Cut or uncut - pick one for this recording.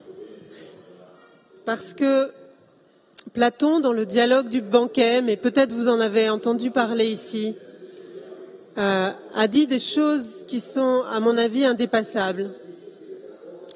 uncut